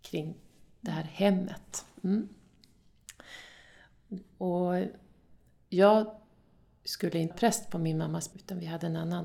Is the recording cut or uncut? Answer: cut